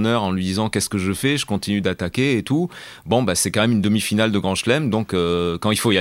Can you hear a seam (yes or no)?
no